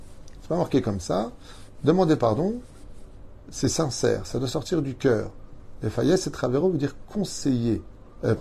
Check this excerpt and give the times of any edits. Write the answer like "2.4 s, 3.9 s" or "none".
none

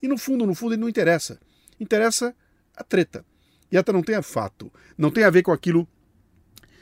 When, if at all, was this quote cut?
3.8 s, 4.2 s, 5.1 s

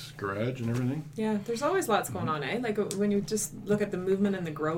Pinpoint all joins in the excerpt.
none

